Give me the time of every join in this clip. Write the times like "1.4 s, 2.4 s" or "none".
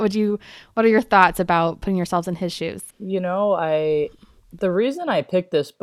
2.9 s